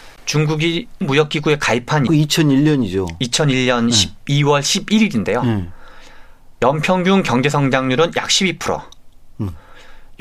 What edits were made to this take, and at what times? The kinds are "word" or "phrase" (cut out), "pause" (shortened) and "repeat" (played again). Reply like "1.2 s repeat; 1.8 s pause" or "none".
1.0 s word; 2.1 s word